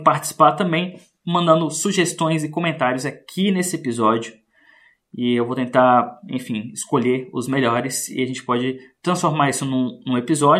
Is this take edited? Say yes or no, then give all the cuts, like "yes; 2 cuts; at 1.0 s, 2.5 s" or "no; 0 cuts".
no; 0 cuts